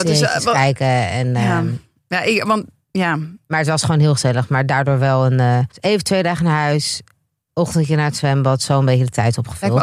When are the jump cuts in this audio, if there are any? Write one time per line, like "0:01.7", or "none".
0:05.7